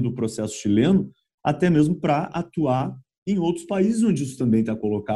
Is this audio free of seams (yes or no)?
yes